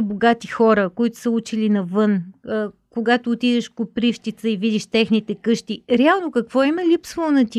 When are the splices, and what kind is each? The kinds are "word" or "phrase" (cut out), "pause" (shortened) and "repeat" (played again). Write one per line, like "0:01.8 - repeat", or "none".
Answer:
none